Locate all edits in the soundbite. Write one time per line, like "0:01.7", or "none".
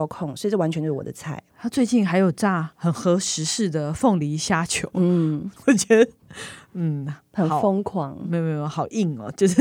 0:05.6